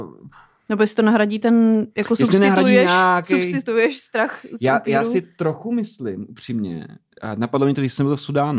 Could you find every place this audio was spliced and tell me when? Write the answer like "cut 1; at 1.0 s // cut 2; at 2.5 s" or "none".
none

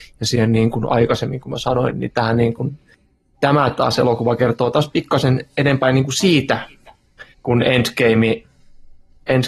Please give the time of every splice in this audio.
cut 1; at 7.3 s

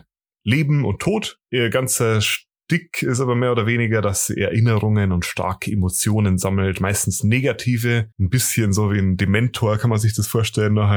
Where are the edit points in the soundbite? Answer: cut 1; at 1.4 s // cut 2; at 8.1 s

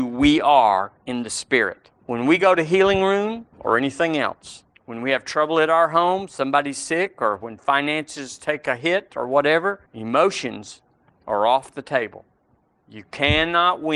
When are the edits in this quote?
cut 1; at 1.0 s // cut 2; at 2.0 s // cut 3; at 3.5 s // cut 4; at 4.7 s // cut 5; at 9.9 s

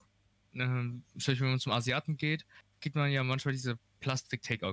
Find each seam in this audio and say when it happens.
none

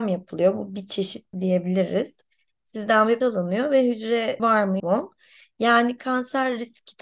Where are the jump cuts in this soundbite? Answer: cut 1; at 1.3 s // cut 2; at 3.2 s // cut 3; at 4.4 s // cut 4; at 4.8 s

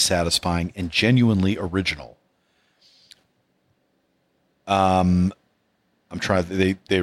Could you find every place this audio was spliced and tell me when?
none

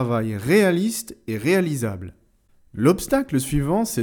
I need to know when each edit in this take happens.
none

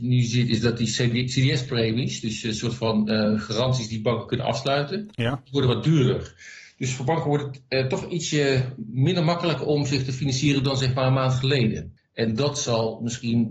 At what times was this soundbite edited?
none

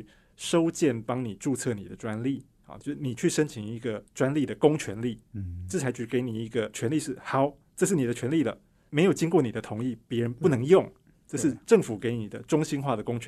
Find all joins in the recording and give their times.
cut 1; at 4.1 s

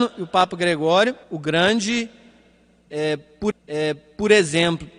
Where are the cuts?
cut 1; at 1.2 s // cut 2; at 3.5 s

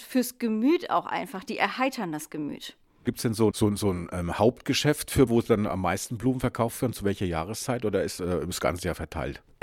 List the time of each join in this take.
cut 1; at 3.5 s // cut 2; at 5.3 s // cut 3; at 8.2 s

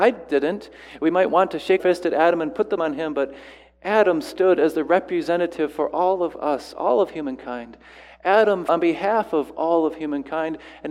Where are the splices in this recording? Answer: cut 1; at 1.8 s // cut 2; at 2.8 s // cut 3; at 8.7 s

